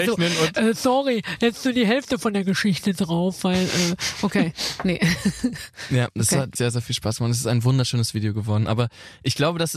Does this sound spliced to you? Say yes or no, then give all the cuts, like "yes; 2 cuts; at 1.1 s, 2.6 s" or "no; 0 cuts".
yes; 1 cut; at 6.6 s